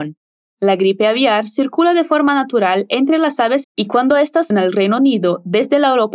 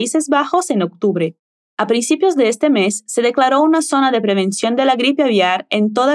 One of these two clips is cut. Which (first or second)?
first